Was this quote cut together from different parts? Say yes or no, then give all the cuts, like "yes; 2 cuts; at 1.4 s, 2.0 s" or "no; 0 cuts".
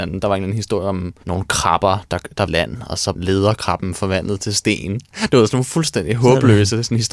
yes; 3 cuts; at 1.2 s, 2.5 s, 3.1 s